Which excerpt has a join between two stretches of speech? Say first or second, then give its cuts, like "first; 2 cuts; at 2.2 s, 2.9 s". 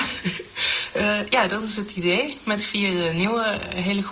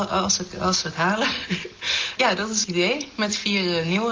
second; 2 cuts; at 2.2 s, 2.6 s